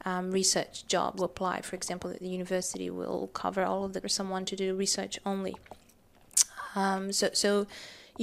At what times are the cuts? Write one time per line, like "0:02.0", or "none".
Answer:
0:01.2
0:04.0